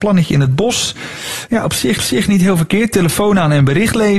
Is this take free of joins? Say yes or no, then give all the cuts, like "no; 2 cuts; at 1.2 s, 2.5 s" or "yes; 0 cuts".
no; 1 cut; at 2.0 s